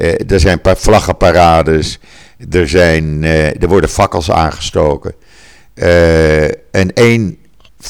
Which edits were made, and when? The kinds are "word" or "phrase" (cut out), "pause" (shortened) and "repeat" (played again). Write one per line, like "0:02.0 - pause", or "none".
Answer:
none